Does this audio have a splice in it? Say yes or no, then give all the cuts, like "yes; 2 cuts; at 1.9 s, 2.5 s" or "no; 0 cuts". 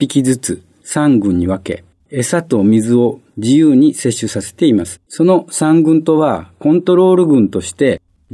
yes; 2 cuts; at 2.0 s, 5.0 s